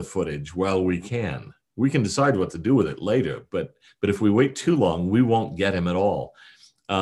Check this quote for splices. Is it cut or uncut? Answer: cut